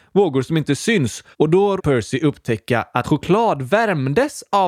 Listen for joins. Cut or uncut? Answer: cut